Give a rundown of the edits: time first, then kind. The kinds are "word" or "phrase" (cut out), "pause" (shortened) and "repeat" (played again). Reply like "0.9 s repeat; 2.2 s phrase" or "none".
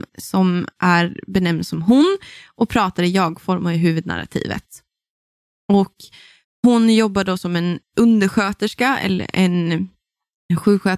none